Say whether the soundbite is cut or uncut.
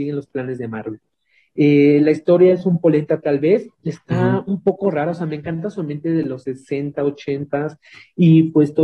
cut